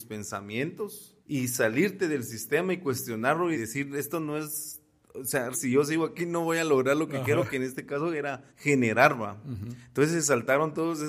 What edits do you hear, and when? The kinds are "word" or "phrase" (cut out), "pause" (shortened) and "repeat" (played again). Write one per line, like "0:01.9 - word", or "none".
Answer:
0:01.2 - pause
0:03.5 - phrase
0:05.5 - word
0:08.5 - pause